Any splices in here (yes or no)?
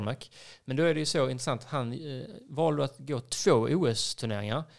no